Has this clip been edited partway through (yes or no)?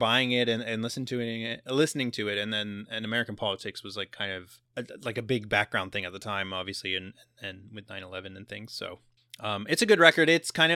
yes